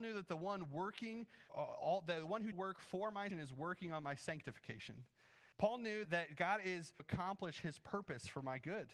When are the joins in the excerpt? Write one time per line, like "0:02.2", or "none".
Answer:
0:01.5
0:02.5
0:03.3
0:05.5
0:06.0
0:07.0